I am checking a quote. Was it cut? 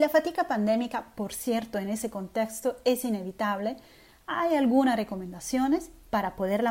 no; 0 cuts

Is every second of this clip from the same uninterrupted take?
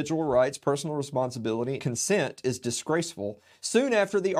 no; 1 cut; at 1.8 s

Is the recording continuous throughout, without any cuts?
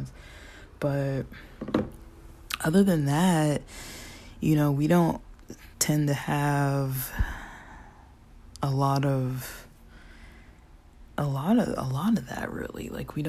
yes; 0 cuts

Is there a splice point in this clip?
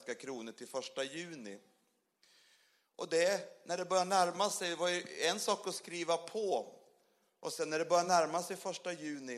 no; 0 cuts

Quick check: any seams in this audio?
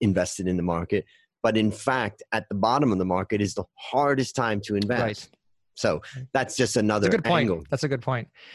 no; 0 cuts

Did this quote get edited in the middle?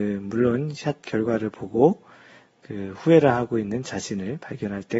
no; 0 cuts

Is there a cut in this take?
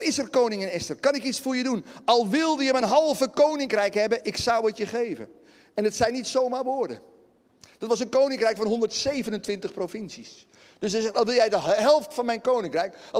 no; 0 cuts

